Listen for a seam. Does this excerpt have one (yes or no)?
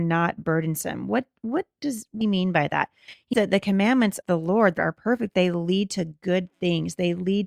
yes